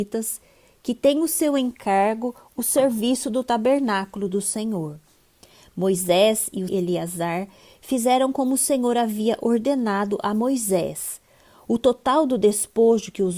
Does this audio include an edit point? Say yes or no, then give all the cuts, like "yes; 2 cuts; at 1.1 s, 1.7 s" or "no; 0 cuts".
yes; 1 cut; at 6.7 s